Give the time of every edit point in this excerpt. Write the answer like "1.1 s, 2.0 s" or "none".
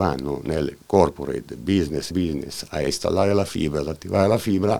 2.1 s